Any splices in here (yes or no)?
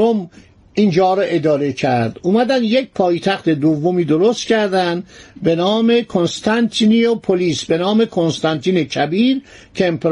no